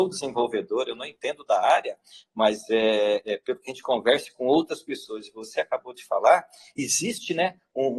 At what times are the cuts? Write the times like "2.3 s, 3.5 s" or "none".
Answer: none